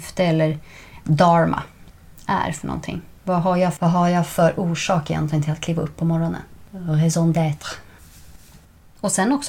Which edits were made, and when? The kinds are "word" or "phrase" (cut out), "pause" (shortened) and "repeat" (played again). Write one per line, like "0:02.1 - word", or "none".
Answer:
0:03.8 - word